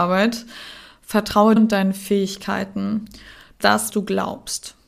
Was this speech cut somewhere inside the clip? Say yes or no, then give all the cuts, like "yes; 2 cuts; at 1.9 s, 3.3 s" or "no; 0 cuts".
yes; 3 cuts; at 1.6 s, 3.6 s, 3.9 s